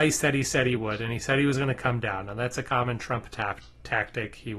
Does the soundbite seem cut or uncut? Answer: uncut